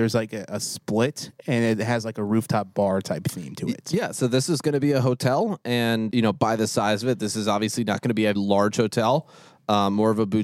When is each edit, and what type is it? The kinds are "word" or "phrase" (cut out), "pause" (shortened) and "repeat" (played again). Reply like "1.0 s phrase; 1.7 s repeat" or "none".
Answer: 6.1 s word; 8.4 s word